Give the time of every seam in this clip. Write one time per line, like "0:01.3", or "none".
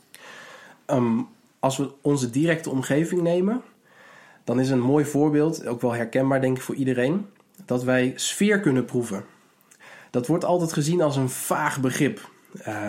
none